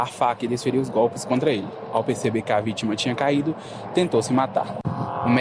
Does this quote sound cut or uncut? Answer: uncut